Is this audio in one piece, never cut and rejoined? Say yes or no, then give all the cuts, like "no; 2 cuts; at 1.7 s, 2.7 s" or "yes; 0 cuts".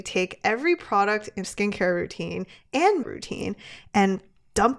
no; 2 cuts; at 1.4 s, 3.0 s